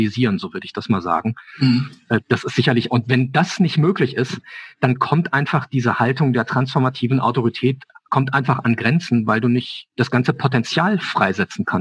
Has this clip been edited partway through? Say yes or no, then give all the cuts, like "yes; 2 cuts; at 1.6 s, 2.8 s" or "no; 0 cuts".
no; 0 cuts